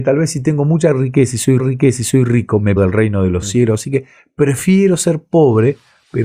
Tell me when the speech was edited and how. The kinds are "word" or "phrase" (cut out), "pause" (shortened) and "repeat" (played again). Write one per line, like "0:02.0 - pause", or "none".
0:01.6 - repeat
0:02.8 - word